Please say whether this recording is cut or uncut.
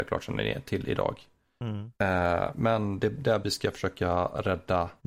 cut